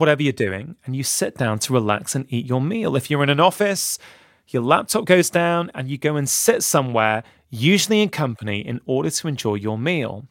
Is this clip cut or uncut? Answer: uncut